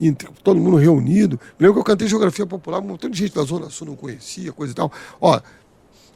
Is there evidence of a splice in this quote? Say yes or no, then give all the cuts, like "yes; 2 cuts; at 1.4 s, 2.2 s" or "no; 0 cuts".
no; 0 cuts